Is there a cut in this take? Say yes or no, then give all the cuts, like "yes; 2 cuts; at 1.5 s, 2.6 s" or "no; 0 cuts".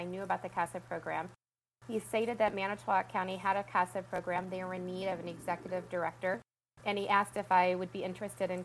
no; 0 cuts